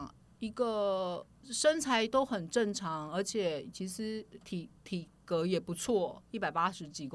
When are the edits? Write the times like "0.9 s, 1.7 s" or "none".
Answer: 1.3 s